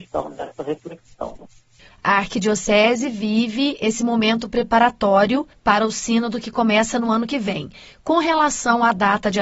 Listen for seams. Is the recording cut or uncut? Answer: uncut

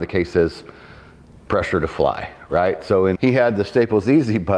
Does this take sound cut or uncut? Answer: cut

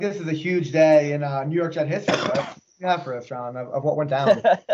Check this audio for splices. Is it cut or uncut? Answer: uncut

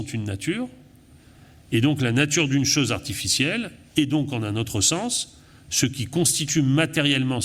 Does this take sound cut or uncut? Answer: uncut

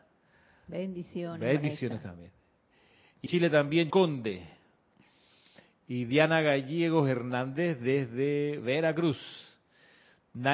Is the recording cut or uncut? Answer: cut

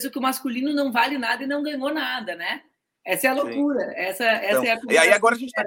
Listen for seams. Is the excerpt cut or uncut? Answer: uncut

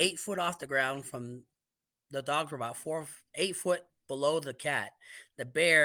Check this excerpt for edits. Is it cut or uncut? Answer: uncut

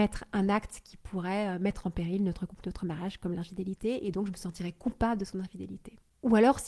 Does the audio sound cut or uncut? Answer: uncut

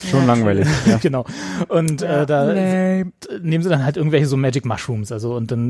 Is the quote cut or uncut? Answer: cut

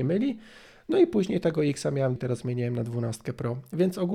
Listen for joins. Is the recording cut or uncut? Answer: cut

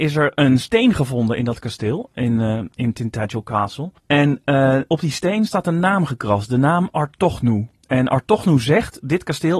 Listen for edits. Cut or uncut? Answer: cut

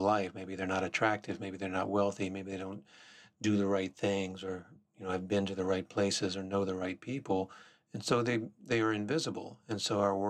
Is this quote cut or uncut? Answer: uncut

